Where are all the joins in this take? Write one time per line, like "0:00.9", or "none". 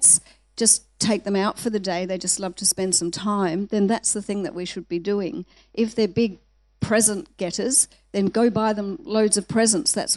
none